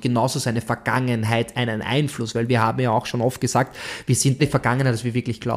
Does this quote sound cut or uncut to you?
cut